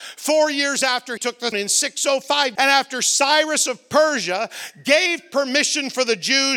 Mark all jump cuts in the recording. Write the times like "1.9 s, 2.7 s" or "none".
1.2 s, 1.5 s, 2.6 s